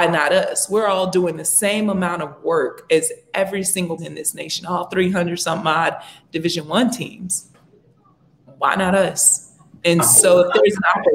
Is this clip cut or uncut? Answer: cut